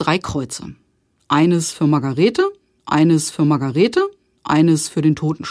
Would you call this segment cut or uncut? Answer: cut